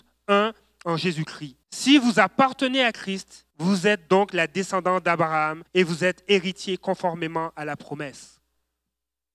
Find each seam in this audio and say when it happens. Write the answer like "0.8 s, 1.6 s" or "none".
1.6 s, 3.5 s, 5.7 s